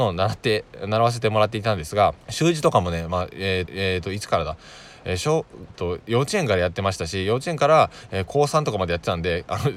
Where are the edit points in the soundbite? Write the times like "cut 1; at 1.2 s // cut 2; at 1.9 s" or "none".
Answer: cut 1; at 2.2 s // cut 2; at 3.7 s // cut 3; at 5.7 s